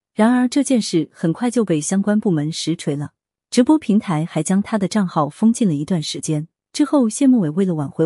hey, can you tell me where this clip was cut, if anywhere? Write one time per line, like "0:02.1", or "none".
none